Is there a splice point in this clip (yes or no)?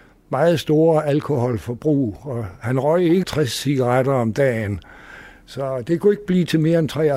yes